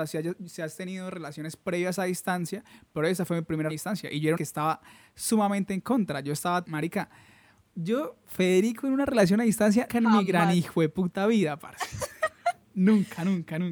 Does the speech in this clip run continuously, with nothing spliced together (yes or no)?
no